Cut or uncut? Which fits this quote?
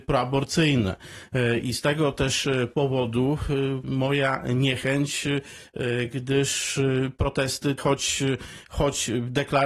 cut